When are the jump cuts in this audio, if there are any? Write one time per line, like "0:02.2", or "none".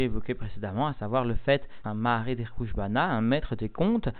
0:01.8